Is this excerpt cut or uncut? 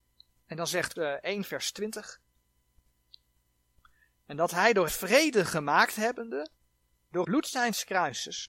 cut